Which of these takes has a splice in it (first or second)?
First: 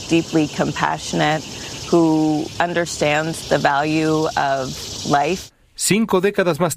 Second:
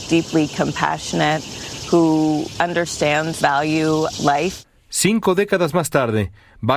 second